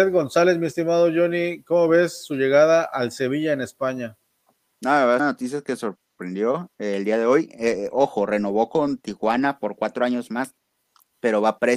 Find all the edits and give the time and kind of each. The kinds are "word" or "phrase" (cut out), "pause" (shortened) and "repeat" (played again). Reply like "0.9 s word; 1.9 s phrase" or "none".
5.2 s phrase

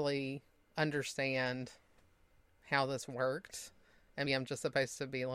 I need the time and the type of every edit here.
4.3 s word

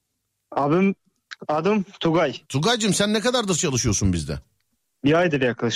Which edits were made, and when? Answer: 2.4 s pause

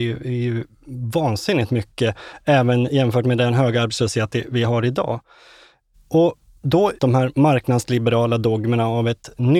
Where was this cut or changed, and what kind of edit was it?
7.0 s word

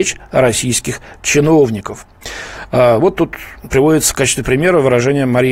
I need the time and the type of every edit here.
none

